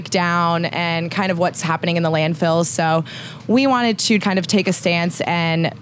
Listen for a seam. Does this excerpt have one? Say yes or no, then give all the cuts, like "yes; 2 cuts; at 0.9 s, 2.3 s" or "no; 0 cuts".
yes; 1 cut; at 4.2 s